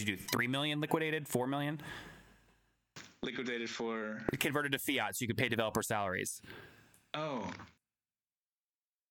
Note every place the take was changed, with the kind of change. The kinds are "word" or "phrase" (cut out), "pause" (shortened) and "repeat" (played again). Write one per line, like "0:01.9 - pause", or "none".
none